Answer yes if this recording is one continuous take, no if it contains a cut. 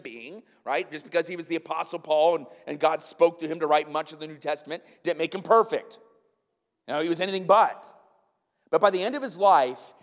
yes